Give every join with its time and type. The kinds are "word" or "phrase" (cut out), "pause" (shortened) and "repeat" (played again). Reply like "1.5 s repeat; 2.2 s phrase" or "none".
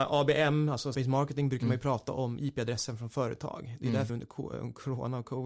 0.9 s word; 4.1 s phrase